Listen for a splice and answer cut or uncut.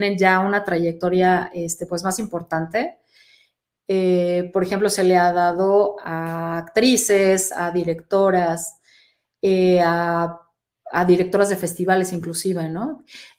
uncut